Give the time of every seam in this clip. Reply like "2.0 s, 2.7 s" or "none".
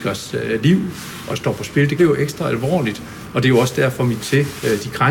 1.3 s, 2.0 s, 4.2 s